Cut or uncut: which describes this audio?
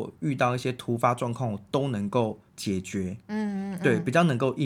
cut